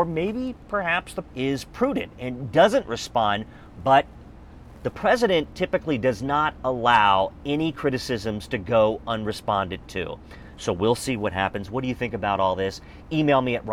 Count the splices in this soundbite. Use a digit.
1